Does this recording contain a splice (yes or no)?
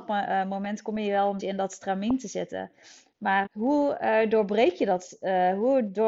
yes